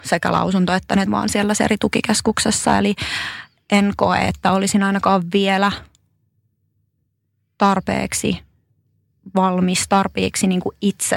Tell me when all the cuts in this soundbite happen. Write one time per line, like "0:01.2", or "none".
0:01.1